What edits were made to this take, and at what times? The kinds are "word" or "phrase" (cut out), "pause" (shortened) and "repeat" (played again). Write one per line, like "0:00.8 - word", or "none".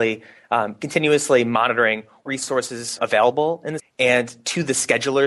0:02.3 - word
0:03.0 - word
0:03.8 - word